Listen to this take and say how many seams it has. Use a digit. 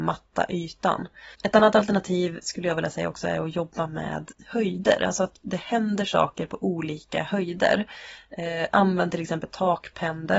1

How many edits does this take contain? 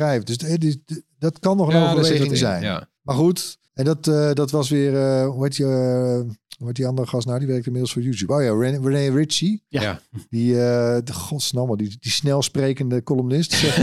2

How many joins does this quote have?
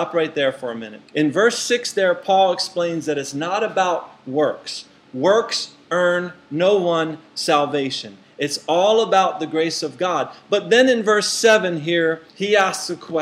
2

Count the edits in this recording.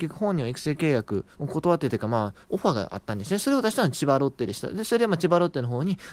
2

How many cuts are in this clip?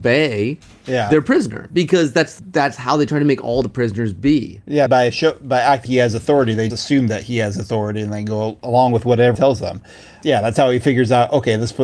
4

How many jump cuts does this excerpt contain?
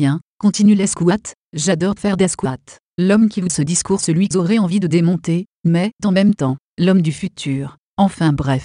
5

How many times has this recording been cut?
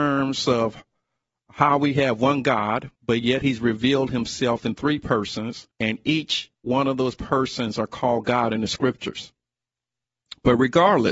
3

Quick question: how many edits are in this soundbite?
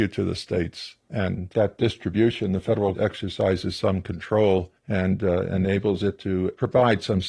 2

